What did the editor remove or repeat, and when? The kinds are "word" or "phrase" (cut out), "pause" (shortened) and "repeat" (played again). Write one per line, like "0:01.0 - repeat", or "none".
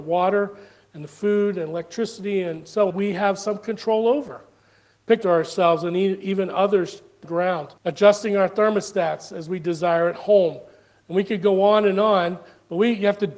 0:02.9 - phrase
0:05.2 - phrase
0:07.2 - phrase
0:07.8 - pause